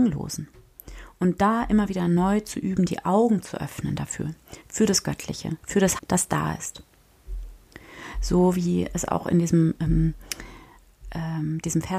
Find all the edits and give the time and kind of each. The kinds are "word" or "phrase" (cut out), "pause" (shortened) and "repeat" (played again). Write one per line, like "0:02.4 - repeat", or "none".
0:05.6 - pause
0:06.0 - word